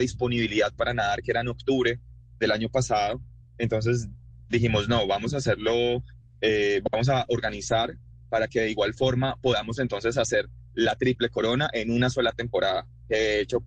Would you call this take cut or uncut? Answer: uncut